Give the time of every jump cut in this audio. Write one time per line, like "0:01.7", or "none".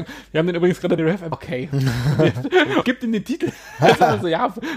0:01.0
0:01.3
0:02.8